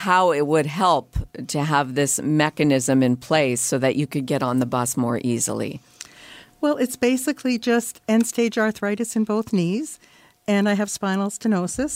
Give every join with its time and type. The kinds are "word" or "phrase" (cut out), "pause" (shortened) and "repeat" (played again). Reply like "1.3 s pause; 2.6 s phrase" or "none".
none